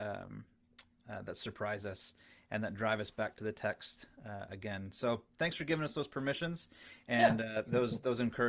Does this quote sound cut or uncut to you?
uncut